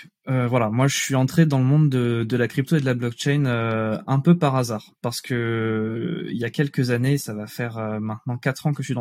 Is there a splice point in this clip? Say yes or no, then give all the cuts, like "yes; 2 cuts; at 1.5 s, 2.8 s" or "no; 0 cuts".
no; 0 cuts